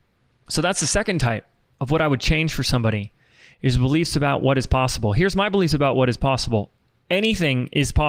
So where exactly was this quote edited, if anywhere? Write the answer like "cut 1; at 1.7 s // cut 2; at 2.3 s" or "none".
none

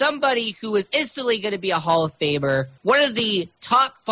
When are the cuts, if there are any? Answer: cut 1; at 2.8 s

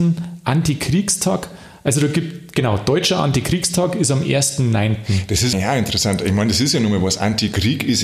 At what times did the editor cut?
cut 1; at 5.5 s

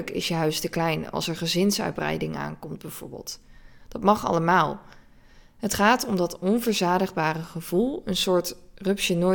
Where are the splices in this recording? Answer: none

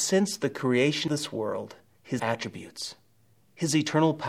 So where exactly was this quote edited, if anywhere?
cut 1; at 1.1 s // cut 2; at 2.2 s

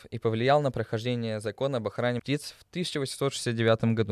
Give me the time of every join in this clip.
cut 1; at 2.2 s

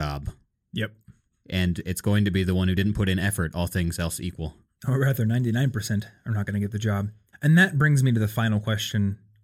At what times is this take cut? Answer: cut 1; at 7.3 s

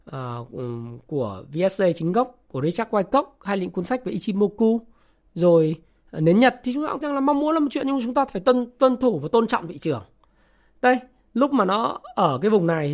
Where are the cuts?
cut 1; at 7.0 s

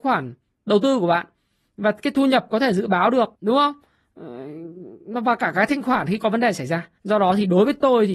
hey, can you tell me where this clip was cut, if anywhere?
cut 1; at 3.4 s // cut 2; at 7.0 s

